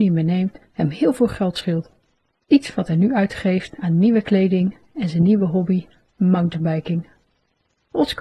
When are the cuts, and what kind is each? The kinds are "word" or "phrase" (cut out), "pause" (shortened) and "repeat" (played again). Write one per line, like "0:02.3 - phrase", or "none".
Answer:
none

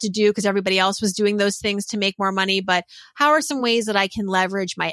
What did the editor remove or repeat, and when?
none

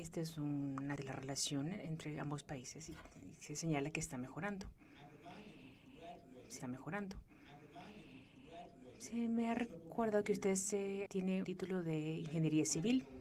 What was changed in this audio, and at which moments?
0:01.0 - phrase
0:06.6 - repeat
0:11.1 - word
0:11.4 - word

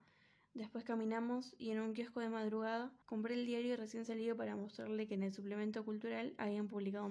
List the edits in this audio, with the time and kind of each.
0:03.0 - pause

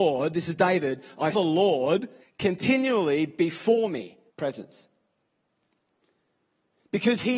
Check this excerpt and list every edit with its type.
0:01.3 - word
0:02.2 - pause
0:04.3 - pause

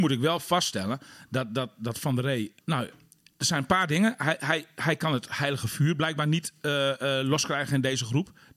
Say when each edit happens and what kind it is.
0:02.6 - pause

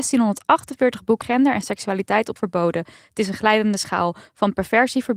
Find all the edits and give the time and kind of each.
0:01.2 - word
0:02.4 - phrase

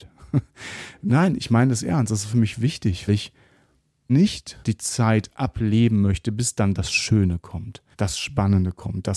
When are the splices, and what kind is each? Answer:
0:03.1 - word
0:04.1 - word
0:04.6 - pause
0:05.3 - word
0:07.9 - pause

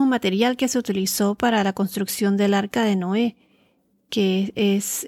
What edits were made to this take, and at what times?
none

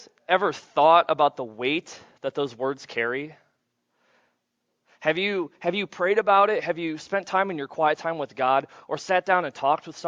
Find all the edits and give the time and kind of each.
none

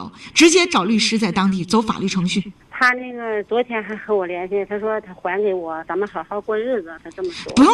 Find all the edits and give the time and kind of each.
0:02.6 - pause

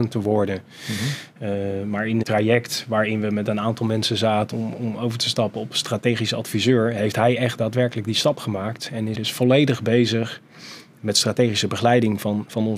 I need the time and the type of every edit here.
0:02.2 - word
0:04.5 - word
0:09.1 - word

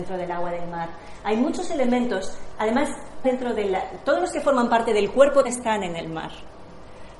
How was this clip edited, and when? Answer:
0:03.2 - phrase
0:05.4 - word

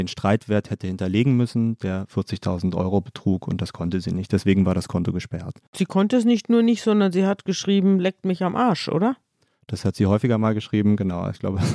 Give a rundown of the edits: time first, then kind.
none

